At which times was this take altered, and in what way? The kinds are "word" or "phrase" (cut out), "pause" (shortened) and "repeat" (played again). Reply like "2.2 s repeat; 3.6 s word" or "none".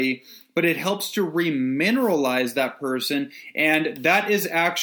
none

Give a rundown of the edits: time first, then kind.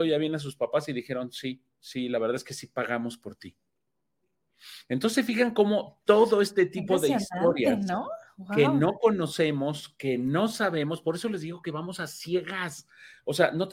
none

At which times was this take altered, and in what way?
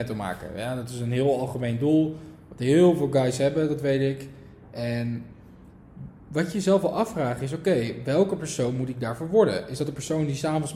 none

